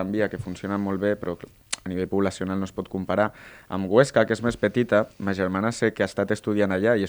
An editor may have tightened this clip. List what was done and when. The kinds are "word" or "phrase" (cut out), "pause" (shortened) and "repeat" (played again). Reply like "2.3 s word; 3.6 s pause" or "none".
none

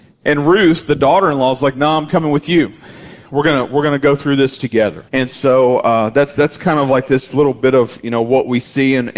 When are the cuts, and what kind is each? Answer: 5.1 s pause

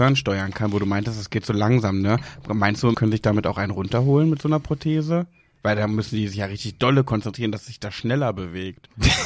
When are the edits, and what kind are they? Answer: 2.9 s word

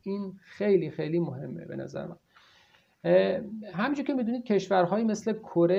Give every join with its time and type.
none

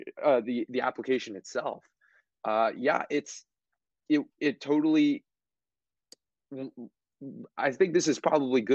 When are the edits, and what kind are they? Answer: none

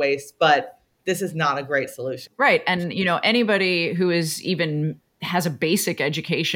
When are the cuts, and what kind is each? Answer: none

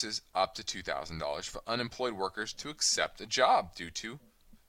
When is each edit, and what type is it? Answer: none

